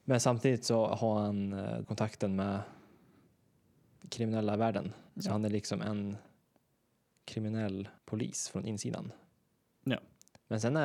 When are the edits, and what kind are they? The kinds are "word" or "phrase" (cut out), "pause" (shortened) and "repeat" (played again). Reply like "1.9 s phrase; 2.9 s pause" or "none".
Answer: 1.8 s word; 5.1 s pause; 8.0 s pause